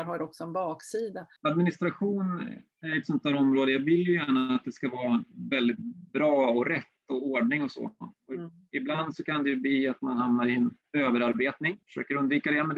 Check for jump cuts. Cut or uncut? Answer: cut